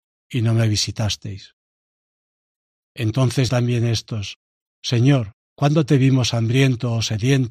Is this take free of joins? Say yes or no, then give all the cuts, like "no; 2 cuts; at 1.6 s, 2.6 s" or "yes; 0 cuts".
no; 2 cuts; at 3.5 s, 5.4 s